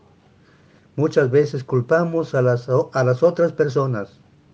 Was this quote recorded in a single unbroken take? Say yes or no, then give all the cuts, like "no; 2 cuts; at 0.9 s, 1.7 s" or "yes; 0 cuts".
yes; 0 cuts